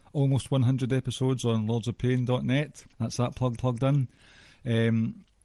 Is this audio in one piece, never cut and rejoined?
no; 2 cuts; at 2.9 s, 3.6 s

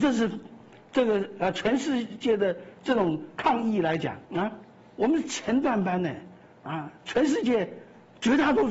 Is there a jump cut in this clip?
yes; 1 cut; at 4.2 s

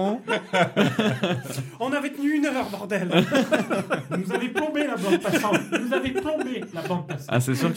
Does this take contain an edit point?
no; 0 cuts

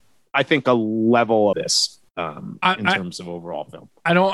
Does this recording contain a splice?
yes; 2 cuts; at 1.5 s, 2.1 s

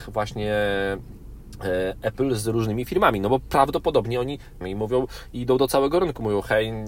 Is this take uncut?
no; 1 cut; at 4.6 s

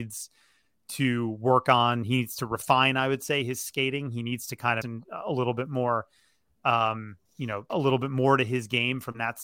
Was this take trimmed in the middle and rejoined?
yes; 3 cuts; at 4.8 s, 7.3 s, 7.7 s

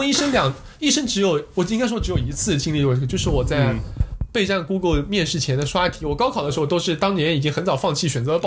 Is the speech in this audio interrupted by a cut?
no; 0 cuts

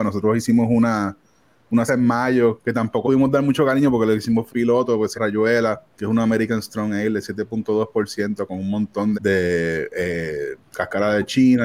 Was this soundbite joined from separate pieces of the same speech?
yes; 6 cuts; at 1.9 s, 3.0 s, 4.5 s, 5.1 s, 5.9 s, 9.1 s

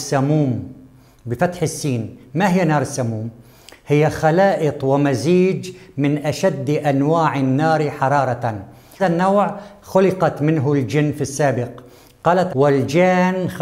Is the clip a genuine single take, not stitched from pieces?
no; 2 cuts; at 9.0 s, 12.5 s

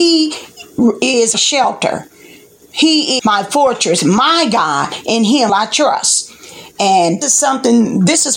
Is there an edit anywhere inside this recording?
yes; 4 cuts; at 1.3 s, 3.2 s, 5.5 s, 7.2 s

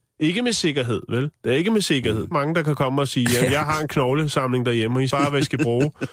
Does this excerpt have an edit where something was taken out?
yes; 2 cuts; at 2.3 s, 5.1 s

